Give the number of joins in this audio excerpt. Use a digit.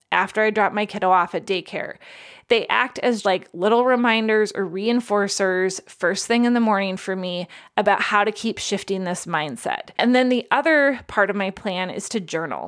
2